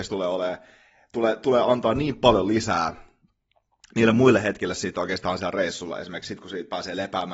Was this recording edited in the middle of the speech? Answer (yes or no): no